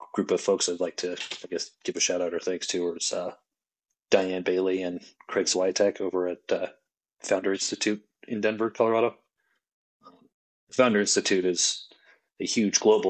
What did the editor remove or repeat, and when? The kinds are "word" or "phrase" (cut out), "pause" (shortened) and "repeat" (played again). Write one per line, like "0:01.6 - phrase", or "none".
none